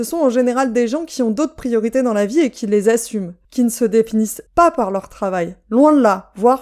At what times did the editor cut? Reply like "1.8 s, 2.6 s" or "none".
3.4 s, 4.5 s